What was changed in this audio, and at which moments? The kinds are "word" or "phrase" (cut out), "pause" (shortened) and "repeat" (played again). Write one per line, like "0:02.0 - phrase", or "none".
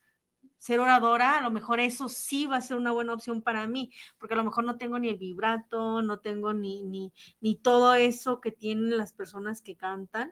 none